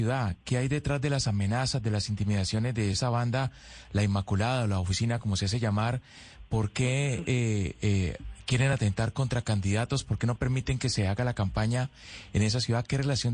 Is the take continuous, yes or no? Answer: yes